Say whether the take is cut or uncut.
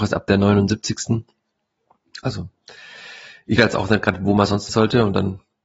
cut